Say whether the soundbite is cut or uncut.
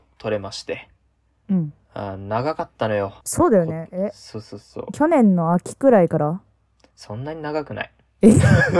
cut